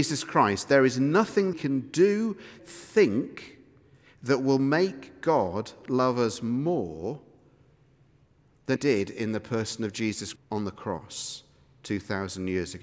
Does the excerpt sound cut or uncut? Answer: cut